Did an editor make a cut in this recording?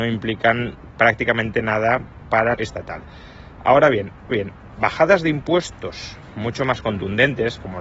yes; 2 cuts; at 2.5 s, 4.3 s

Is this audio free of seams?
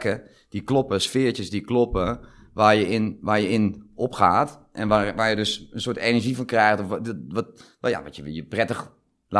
yes; 0 cuts

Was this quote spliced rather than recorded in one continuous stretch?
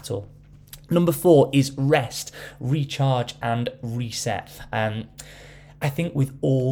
no; 0 cuts

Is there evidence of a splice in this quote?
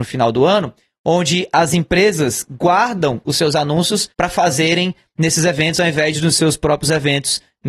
yes; 1 cut; at 4.1 s

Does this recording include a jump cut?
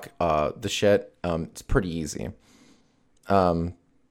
no; 0 cuts

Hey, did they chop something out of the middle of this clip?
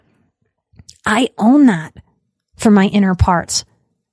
no; 0 cuts

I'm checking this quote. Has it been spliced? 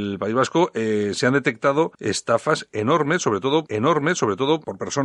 yes; 2 cuts; at 1.9 s, 3.7 s

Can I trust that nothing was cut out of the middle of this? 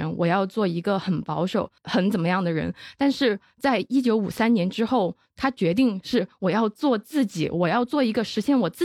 no; 1 cut; at 1.8 s

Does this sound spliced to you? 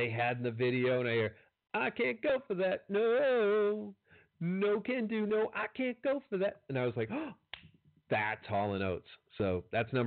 no; 0 cuts

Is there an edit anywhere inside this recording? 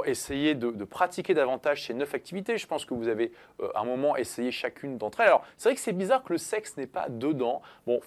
no; 0 cuts

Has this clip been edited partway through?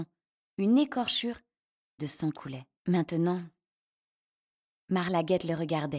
yes; 3 cuts; at 2.0 s, 2.3 s, 2.8 s

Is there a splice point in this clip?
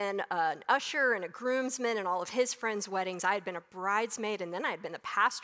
no; 0 cuts

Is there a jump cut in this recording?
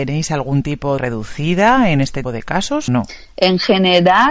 yes; 3 cuts; at 1.0 s, 2.2 s, 2.9 s

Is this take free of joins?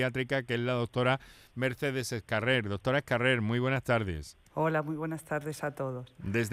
no; 1 cut; at 4.5 s

